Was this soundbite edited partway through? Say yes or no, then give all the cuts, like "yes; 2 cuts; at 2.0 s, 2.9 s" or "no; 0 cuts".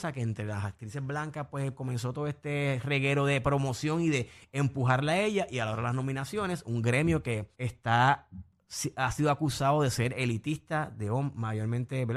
yes; 1 cut; at 7.5 s